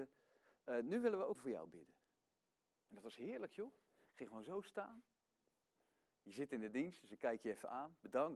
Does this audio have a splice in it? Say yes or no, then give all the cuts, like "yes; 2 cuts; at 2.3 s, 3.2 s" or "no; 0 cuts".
yes; 1 cut; at 1.3 s